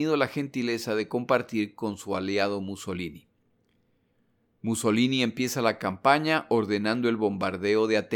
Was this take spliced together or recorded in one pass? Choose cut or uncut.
uncut